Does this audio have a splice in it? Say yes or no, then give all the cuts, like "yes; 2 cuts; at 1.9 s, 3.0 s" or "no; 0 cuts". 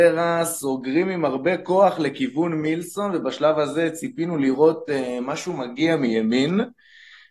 no; 0 cuts